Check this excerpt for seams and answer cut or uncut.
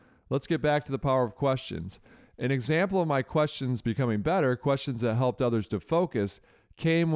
uncut